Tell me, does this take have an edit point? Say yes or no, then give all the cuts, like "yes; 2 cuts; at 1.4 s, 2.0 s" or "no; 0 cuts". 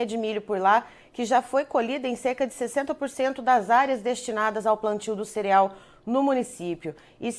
no; 0 cuts